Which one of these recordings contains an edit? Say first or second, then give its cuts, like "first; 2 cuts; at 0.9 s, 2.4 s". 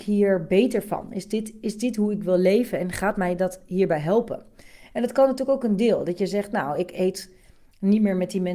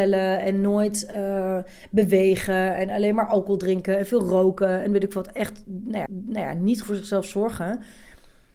second; 2 cuts; at 6.1 s, 6.8 s